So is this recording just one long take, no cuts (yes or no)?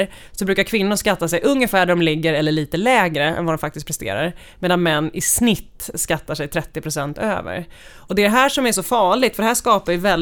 yes